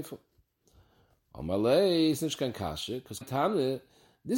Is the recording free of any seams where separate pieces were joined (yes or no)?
no